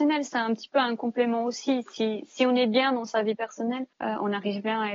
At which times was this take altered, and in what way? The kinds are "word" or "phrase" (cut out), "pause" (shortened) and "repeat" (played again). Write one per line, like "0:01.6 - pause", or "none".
0:03.9 - pause